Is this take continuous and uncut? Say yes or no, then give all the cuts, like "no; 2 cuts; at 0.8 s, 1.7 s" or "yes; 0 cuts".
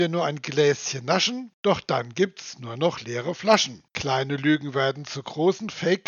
no; 2 cuts; at 1.5 s, 3.9 s